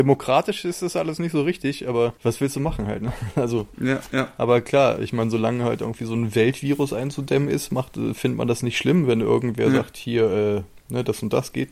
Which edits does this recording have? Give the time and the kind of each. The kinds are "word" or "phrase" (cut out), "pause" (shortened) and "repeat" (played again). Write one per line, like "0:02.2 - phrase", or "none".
0:02.2 - pause